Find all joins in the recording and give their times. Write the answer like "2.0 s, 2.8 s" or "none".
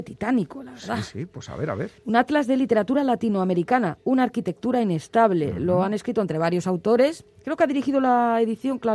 2.0 s